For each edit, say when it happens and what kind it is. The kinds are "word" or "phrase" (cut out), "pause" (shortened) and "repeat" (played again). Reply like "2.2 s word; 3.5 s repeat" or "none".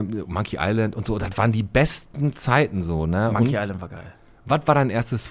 none